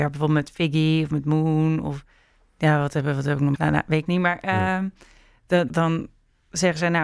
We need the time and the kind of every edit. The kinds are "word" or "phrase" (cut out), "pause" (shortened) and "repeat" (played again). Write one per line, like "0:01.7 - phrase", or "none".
0:03.5 - word
0:04.1 - word
0:05.7 - word